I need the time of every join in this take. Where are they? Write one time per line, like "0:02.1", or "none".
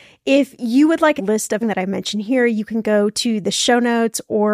0:01.2
0:01.6